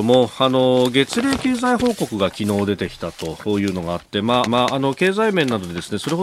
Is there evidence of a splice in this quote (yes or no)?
yes